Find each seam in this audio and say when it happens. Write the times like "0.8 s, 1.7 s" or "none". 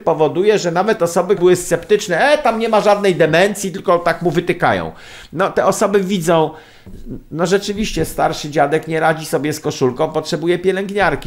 1.4 s